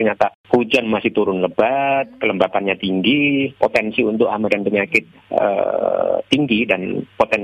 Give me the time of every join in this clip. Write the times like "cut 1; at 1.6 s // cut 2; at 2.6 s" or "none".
none